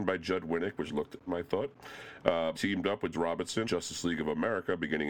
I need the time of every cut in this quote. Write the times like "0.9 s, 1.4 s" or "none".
1.3 s, 2.5 s, 3.1 s, 3.6 s